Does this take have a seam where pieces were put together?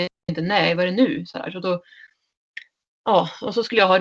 no; 0 cuts

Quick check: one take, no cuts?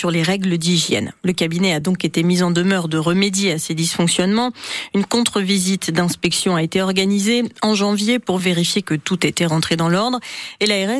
yes; 0 cuts

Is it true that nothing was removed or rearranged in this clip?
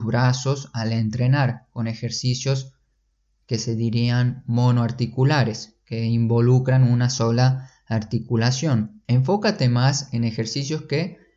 yes; 0 cuts

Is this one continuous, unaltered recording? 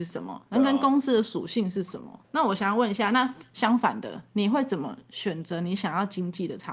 no; 1 cut; at 2.2 s

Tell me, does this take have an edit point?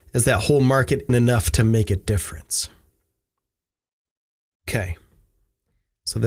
yes; 1 cut; at 1.1 s

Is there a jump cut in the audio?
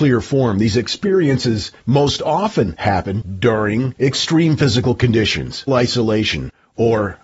yes; 2 cuts; at 1.8 s, 5.7 s

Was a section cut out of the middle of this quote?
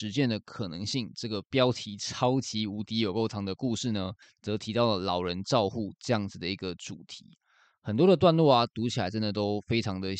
no; 0 cuts

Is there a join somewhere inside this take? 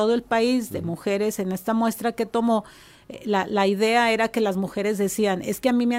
no; 0 cuts

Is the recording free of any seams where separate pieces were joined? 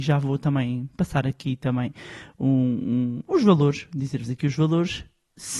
yes; 0 cuts

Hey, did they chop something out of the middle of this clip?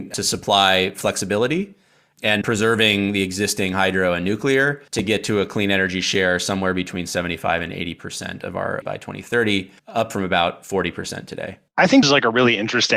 yes; 6 cuts; at 2.4 s, 4.9 s, 8.8 s, 9.8 s, 11.7 s, 12.0 s

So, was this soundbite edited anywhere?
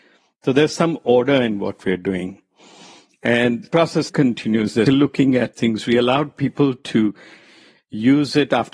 yes; 4 cuts; at 3.7 s, 4.1 s, 4.9 s, 5.5 s

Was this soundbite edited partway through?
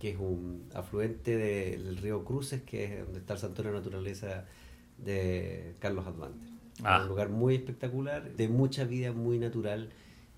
yes; 1 cut; at 8.4 s

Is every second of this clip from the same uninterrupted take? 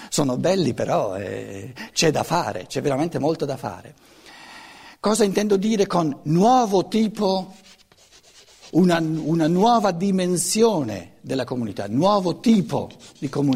yes; 0 cuts

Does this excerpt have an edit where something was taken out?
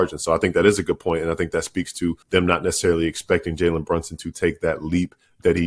yes; 1 cut; at 2.2 s

